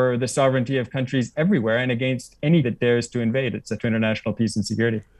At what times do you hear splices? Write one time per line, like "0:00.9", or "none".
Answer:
0:02.6
0:03.8